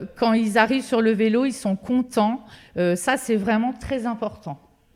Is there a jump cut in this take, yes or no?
no